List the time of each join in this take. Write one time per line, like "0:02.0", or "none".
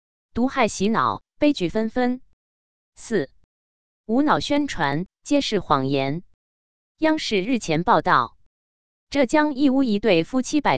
none